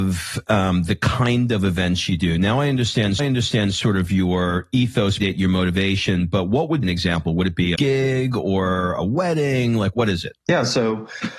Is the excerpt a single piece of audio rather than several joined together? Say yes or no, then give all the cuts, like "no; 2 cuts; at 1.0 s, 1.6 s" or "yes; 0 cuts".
no; 6 cuts; at 3.2 s, 5.2 s, 6.8 s, 7.7 s, 9.9 s, 10.4 s